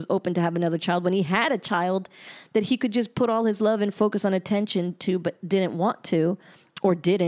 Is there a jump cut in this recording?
no; 0 cuts

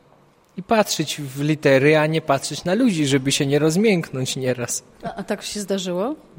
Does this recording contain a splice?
no; 0 cuts

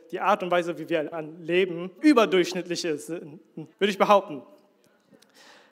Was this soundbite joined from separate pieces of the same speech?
yes; 3 cuts; at 1.1 s, 2.0 s, 3.7 s

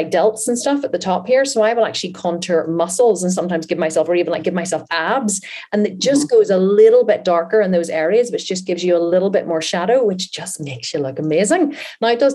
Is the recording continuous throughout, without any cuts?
yes; 0 cuts

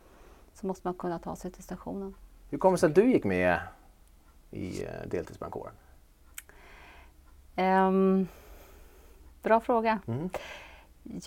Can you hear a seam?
no; 0 cuts

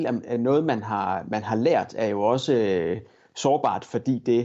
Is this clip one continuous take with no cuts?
yes; 0 cuts

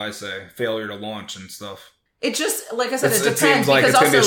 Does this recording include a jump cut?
yes; 1 cut; at 2.1 s

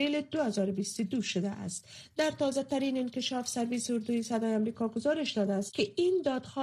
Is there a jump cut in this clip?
no; 0 cuts

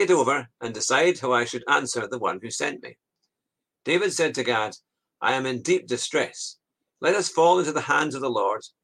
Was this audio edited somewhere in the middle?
no; 0 cuts

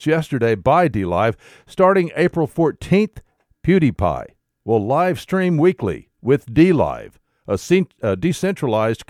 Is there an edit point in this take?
no; 0 cuts

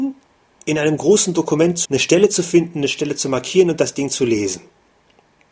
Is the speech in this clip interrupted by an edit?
yes; 1 cut; at 1.8 s

